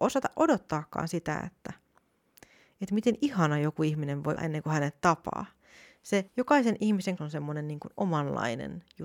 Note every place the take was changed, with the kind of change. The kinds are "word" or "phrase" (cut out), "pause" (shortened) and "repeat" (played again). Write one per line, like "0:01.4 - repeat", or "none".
0:04.4 - word
0:06.3 - pause
0:07.2 - word